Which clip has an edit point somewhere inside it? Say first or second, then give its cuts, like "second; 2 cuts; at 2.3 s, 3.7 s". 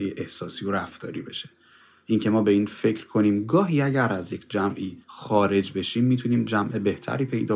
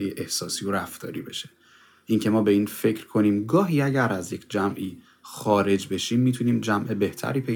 first; 1 cut; at 5.0 s